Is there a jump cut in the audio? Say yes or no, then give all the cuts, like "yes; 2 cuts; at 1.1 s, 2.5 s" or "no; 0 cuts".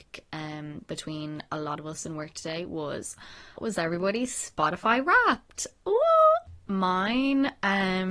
yes; 1 cut; at 3.6 s